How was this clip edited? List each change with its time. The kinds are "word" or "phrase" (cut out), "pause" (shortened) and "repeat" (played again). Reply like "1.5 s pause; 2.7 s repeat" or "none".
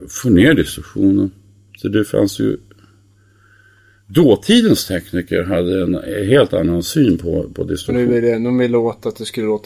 none